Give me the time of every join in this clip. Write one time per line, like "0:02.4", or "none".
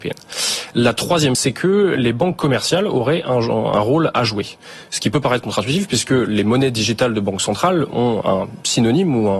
0:01.3
0:08.2